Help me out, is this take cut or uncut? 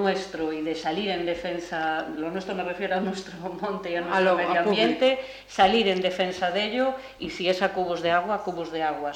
uncut